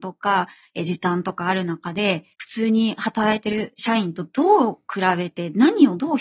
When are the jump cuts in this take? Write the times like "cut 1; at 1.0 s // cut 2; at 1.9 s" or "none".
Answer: cut 1; at 2.3 s

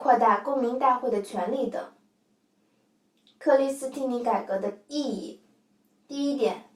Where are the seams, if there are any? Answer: none

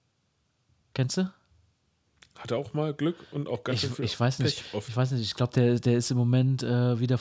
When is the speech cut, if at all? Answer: none

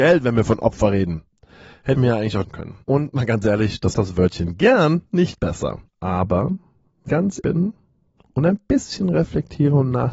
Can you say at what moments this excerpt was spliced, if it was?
cut 1; at 1.9 s // cut 2; at 2.4 s // cut 3; at 2.8 s // cut 4; at 3.9 s // cut 5; at 5.9 s // cut 6; at 7.1 s // cut 7; at 7.4 s

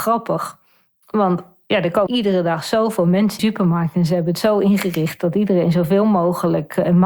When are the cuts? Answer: cut 1; at 2.1 s // cut 2; at 3.4 s

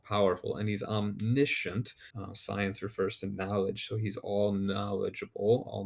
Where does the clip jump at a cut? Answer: cut 1; at 2.1 s

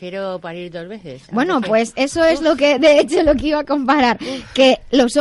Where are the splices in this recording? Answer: none

